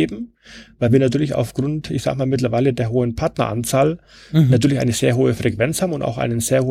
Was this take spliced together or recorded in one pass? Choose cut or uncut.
uncut